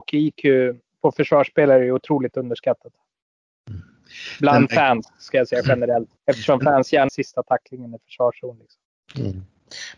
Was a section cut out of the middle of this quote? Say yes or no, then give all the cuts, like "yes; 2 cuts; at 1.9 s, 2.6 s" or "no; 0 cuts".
yes; 2 cuts; at 6.2 s, 7.1 s